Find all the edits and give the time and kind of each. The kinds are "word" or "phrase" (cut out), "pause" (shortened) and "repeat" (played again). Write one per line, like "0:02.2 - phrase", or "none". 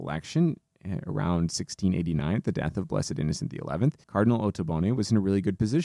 0:04.0 - pause